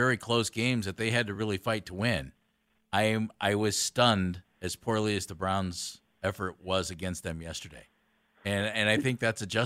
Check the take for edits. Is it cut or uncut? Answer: uncut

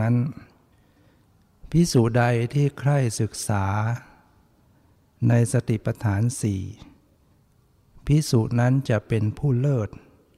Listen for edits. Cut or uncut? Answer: uncut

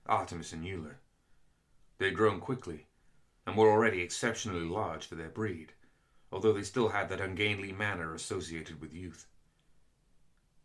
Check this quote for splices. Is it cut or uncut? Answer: uncut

